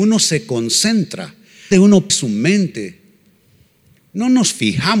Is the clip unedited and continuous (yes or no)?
no